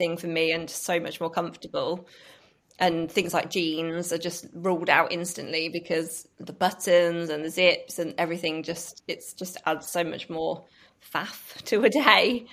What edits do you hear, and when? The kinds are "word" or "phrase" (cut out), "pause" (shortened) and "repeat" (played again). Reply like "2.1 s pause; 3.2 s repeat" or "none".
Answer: none